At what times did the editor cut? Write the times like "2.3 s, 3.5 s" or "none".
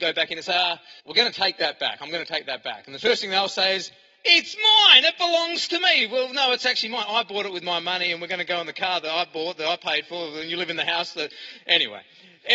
1.0 s